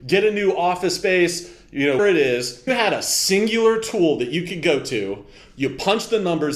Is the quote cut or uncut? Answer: cut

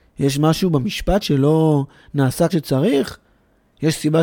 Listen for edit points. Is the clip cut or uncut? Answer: cut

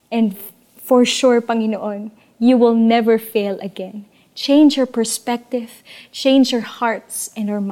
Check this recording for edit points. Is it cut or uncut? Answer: uncut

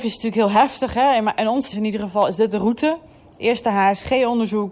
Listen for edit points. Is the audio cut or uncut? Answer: cut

